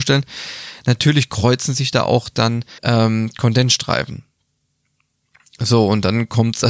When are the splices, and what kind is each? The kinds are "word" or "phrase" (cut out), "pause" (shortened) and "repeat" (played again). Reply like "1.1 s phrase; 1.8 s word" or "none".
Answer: 2.8 s pause